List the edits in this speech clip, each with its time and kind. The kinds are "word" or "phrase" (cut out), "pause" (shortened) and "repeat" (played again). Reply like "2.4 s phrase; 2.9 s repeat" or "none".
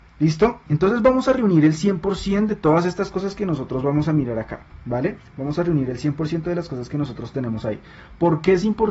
none